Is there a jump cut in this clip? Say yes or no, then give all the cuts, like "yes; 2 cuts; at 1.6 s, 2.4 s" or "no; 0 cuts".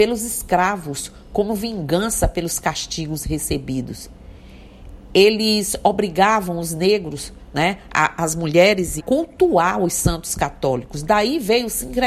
yes; 1 cut; at 9.0 s